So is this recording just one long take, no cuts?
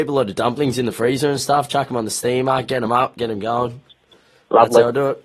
yes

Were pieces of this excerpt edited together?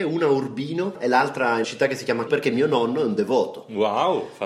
yes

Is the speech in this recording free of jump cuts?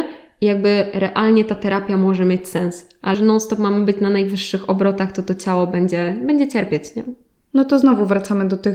no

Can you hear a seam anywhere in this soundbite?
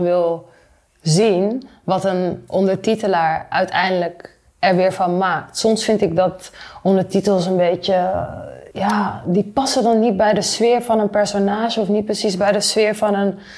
yes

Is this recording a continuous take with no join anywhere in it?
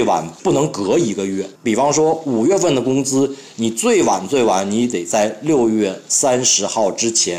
no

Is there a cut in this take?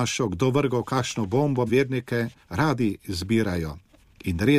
yes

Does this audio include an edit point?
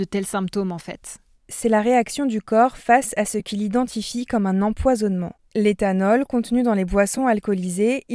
no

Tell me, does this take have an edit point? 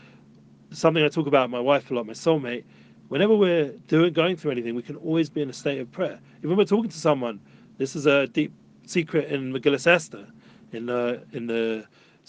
no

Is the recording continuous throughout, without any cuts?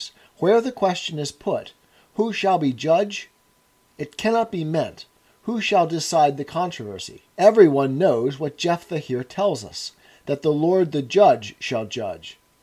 yes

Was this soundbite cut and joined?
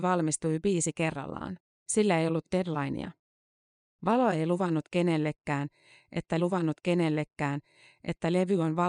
yes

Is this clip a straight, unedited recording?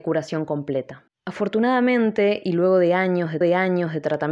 no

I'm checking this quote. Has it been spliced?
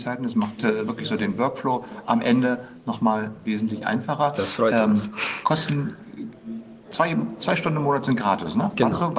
yes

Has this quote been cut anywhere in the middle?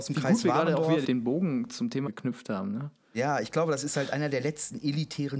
yes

